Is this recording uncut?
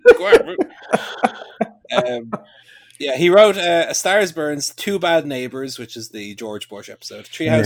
yes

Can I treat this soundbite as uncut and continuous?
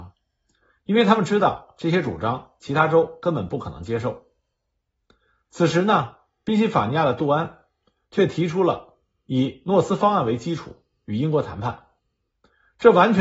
yes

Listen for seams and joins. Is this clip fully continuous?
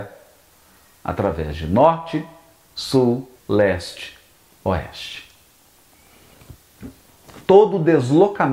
no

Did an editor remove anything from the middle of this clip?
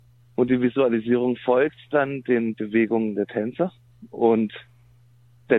no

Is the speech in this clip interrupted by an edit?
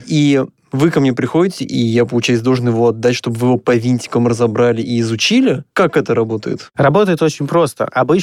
no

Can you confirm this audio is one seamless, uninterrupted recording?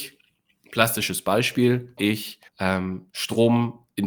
no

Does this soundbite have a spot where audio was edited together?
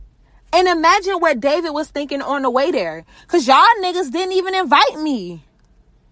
no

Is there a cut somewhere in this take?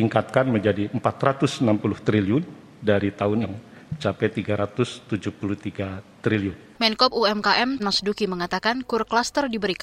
yes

